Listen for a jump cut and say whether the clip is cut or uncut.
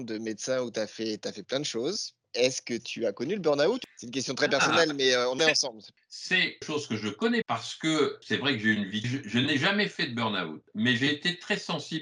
cut